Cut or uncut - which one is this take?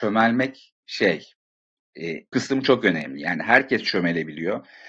cut